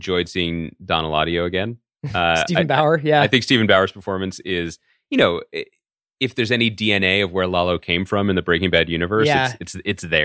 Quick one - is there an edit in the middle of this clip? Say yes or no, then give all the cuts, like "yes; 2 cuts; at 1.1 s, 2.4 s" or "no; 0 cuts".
no; 0 cuts